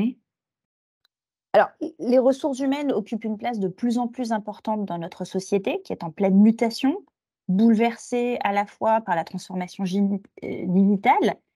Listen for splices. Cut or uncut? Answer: uncut